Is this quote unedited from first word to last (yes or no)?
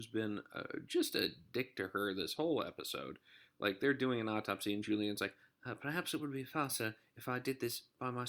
yes